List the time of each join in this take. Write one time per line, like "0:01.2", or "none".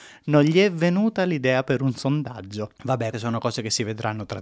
0:03.1